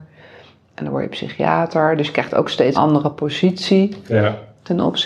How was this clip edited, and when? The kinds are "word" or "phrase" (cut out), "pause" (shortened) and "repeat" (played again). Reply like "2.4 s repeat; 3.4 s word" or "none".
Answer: 2.7 s word